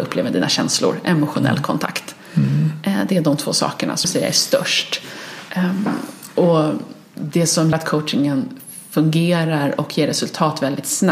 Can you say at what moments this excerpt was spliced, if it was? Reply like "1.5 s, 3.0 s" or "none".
4.0 s, 7.7 s